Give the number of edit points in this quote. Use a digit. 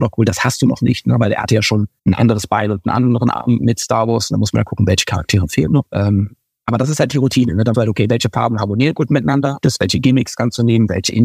3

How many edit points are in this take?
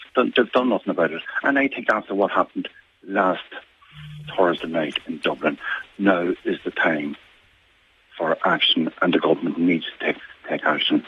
0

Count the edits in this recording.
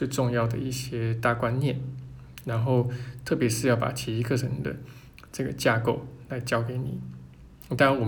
0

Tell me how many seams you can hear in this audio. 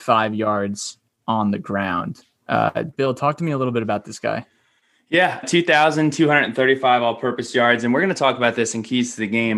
1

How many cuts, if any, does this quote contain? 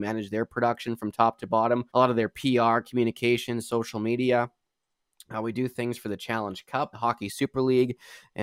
2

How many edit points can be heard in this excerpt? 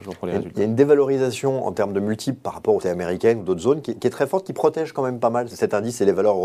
2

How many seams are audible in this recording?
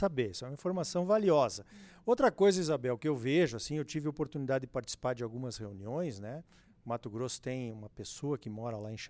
0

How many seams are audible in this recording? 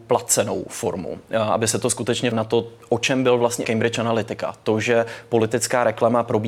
2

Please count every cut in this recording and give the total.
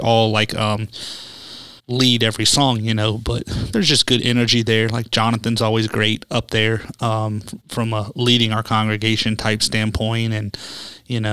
2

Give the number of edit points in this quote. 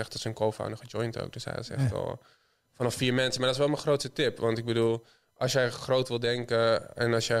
0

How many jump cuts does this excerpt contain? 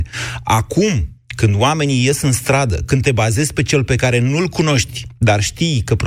1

